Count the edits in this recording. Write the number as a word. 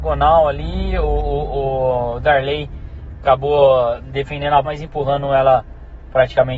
one